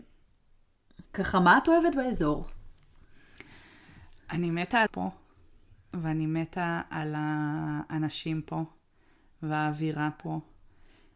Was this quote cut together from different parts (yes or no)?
yes